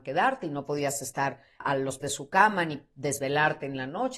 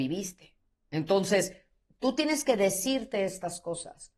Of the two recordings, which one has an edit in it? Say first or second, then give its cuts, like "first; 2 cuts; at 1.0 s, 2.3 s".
first; 2 cuts; at 1.6 s, 2.0 s